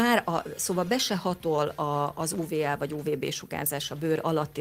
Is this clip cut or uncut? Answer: uncut